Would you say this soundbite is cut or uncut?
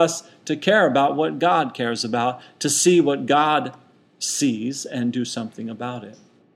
uncut